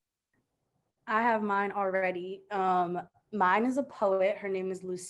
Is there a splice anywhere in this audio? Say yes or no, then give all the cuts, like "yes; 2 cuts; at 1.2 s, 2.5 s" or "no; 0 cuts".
no; 0 cuts